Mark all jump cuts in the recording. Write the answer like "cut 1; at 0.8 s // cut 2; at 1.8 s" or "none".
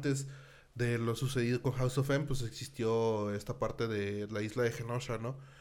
none